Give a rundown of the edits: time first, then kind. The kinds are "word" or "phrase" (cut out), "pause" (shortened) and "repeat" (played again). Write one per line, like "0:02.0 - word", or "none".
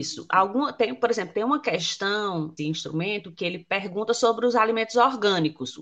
0:02.6 - phrase

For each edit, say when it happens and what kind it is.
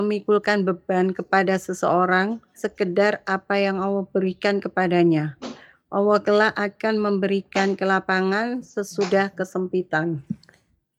0:02.6 - word

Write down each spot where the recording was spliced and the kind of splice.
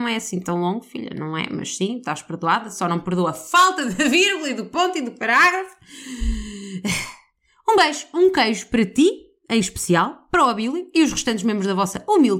none

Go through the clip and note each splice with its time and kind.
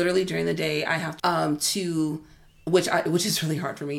0:01.2 - phrase

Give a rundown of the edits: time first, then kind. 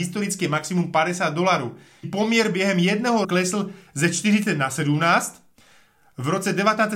0:02.0 - word
0:03.2 - word

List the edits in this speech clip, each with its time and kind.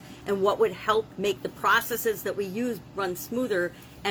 0:01.2 - word

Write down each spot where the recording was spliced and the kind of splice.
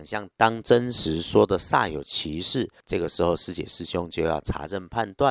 0:02.8 - pause

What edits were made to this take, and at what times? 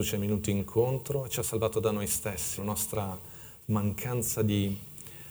0:02.6 - word

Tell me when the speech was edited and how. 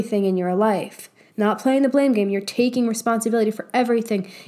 none

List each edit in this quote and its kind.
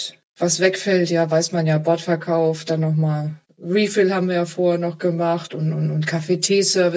none

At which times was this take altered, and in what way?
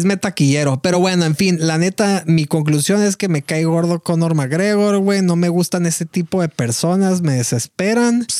none

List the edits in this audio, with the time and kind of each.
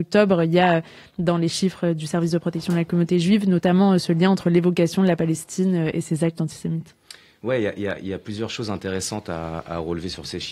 none

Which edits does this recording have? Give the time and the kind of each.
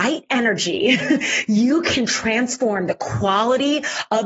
none

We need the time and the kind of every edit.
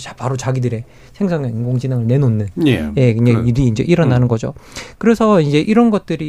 none

